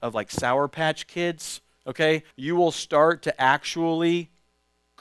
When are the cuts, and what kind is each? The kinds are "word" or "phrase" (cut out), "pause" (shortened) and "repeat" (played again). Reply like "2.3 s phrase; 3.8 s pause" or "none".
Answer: 2.3 s pause